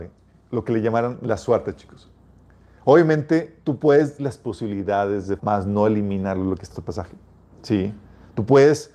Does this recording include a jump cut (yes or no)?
yes